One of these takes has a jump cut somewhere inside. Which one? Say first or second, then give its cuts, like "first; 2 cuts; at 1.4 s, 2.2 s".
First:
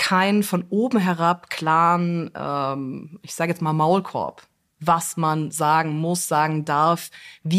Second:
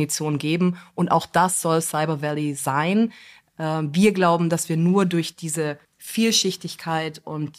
second; 1 cut; at 5.8 s